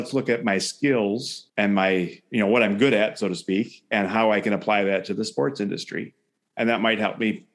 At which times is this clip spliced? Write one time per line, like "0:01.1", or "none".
0:01.5

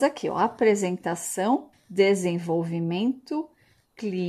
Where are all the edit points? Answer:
0:01.7

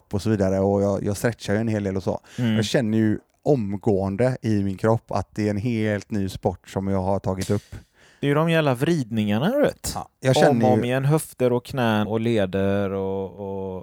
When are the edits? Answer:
0:12.1

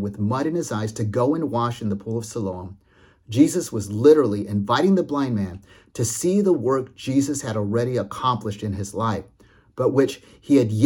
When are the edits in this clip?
none

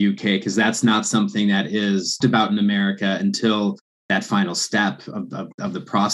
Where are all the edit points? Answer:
0:02.2

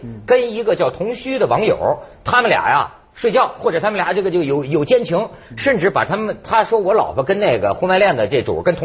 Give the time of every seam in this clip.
none

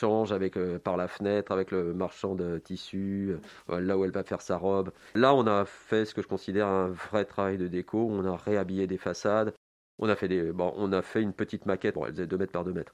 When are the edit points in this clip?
none

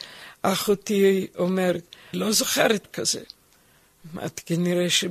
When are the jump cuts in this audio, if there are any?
0:02.1
0:02.8

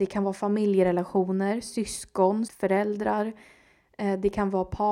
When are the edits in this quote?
0:02.5

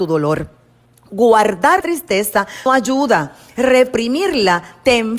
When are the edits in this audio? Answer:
0:01.8
0:02.7

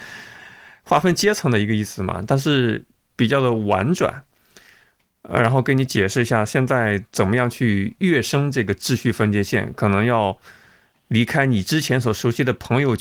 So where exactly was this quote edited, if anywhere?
none

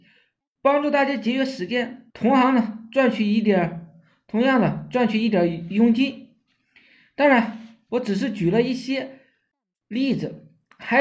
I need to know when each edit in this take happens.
0:02.1

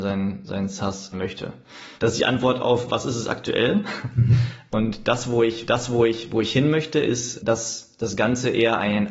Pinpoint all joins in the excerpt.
0:01.1
0:02.0
0:04.7
0:05.7
0:07.4

